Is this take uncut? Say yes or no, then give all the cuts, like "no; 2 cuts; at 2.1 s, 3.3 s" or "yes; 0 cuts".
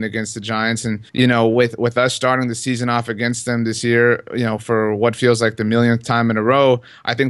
no; 1 cut; at 1.1 s